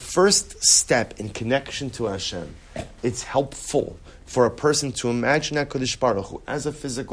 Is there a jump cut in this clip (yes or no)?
no